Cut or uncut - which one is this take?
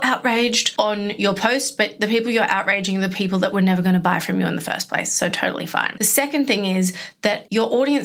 uncut